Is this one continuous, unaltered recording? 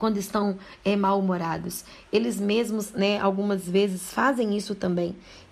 yes; 0 cuts

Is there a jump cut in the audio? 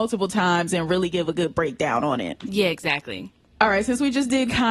no; 0 cuts

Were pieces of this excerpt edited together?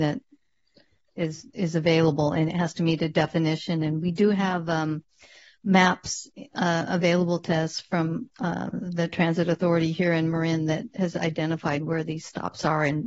no; 0 cuts

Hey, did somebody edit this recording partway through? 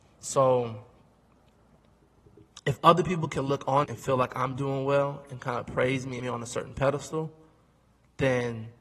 yes; 2 cuts; at 3.8 s, 6.2 s

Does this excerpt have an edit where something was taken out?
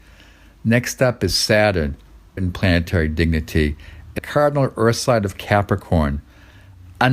yes; 2 cuts; at 2.4 s, 4.2 s

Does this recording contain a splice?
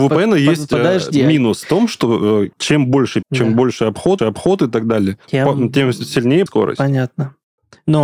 yes; 5 cuts; at 2.5 s, 3.2 s, 4.2 s, 5.2 s, 6.5 s

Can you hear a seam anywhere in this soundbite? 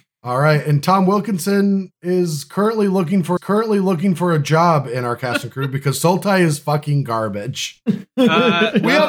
yes; 1 cut; at 3.4 s

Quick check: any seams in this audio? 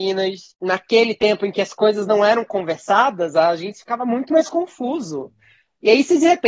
no; 0 cuts

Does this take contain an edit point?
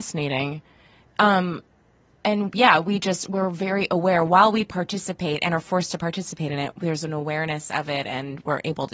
no; 0 cuts

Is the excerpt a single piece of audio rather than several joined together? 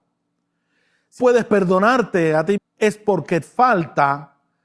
no; 3 cuts; at 1.2 s, 2.6 s, 3.4 s

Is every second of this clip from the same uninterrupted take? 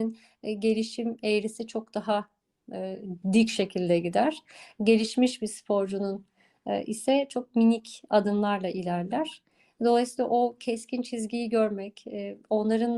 no; 1 cut; at 3.2 s

